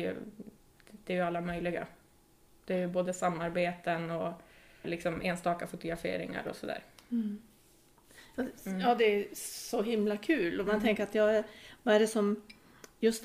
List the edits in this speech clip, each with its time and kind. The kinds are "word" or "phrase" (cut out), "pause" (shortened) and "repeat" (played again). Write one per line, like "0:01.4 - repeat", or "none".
0:04.8 - word